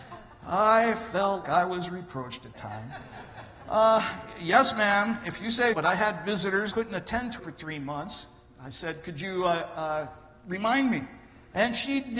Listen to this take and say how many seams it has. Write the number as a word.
five